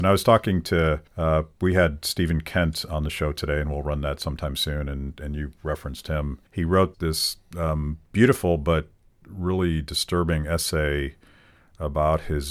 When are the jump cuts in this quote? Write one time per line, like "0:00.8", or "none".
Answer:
0:01.1
0:06.5
0:06.9
0:08.1

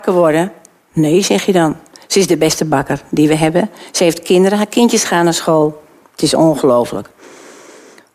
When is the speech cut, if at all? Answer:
none

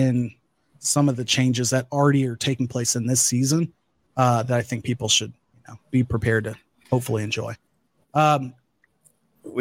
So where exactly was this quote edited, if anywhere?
none

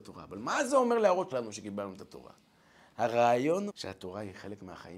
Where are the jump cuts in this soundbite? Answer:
0:01.3
0:03.7

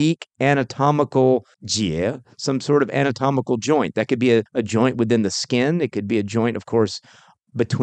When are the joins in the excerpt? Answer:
0:01.5
0:04.5

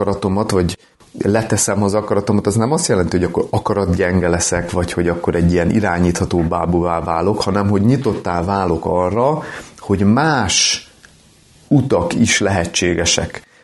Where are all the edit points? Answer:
none

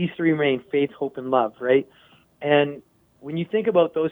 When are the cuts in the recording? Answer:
none

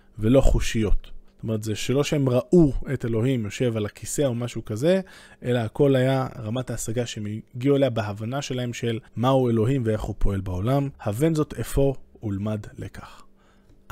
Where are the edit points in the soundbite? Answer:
0:01.3
0:09.1
0:10.9

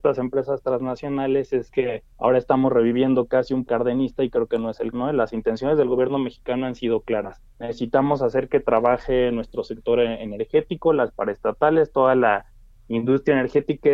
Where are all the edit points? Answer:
0:02.1
0:03.6
0:04.9
0:07.5

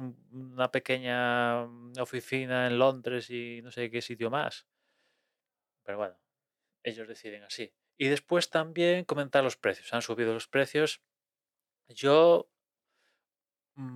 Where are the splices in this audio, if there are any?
none

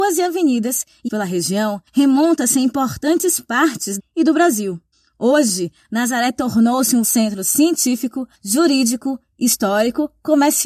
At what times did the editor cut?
0:01.1
0:01.9
0:04.0
0:04.9
0:07.0
0:08.3

